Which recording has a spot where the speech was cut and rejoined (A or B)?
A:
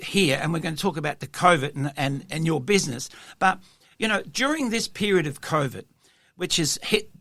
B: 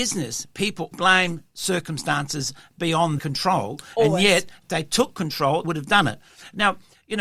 B